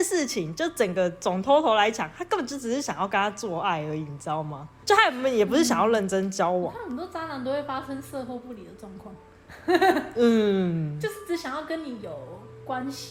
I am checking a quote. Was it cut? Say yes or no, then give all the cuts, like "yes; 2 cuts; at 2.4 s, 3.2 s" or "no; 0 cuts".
no; 0 cuts